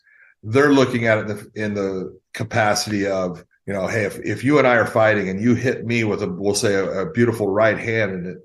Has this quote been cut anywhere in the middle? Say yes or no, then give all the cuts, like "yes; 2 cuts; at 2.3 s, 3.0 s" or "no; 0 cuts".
yes; 2 cuts; at 2.2 s, 3.5 s